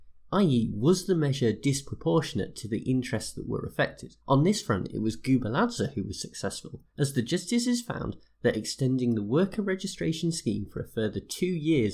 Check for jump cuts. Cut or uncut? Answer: cut